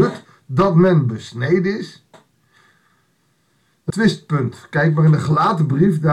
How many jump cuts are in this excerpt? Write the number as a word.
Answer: one